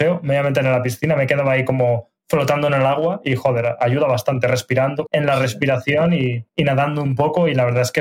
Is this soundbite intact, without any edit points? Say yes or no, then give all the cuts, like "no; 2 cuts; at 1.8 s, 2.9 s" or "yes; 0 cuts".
no; 2 cuts; at 5.1 s, 6.5 s